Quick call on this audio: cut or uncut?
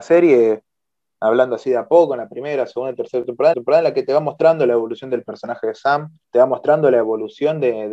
cut